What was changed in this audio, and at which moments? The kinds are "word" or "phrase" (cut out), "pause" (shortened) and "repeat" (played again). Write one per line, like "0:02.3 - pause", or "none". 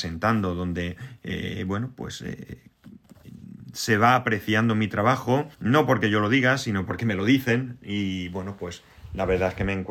0:05.5 - pause